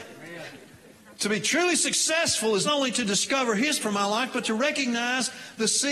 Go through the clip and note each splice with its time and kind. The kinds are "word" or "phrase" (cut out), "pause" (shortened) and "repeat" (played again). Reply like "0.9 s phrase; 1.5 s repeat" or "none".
1.2 s pause; 2.6 s word; 3.8 s word